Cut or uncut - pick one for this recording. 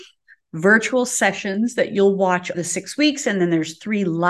cut